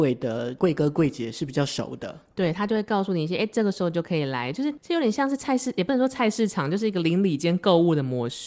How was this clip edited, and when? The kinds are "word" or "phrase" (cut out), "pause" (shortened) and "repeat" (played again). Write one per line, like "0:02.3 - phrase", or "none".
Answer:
none